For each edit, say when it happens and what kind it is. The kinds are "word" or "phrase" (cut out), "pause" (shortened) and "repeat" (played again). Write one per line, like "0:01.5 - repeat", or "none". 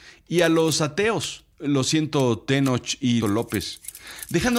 0:01.5 - pause
0:03.2 - phrase